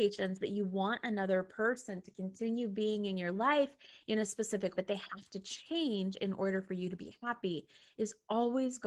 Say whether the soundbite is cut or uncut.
cut